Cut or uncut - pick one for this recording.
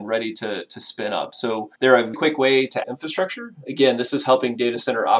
cut